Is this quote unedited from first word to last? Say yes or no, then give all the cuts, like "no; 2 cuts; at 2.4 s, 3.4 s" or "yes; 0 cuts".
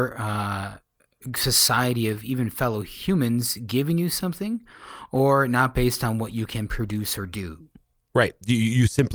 yes; 0 cuts